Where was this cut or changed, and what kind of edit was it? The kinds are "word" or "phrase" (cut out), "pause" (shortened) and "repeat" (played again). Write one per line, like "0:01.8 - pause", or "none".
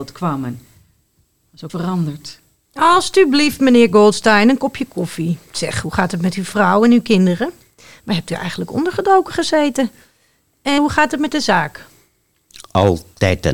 0:01.7 - word
0:10.8 - word